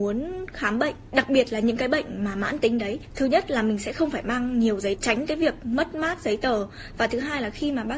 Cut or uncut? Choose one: cut